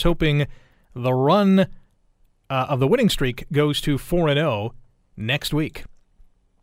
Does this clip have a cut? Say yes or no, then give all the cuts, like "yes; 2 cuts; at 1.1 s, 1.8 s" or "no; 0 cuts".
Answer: no; 0 cuts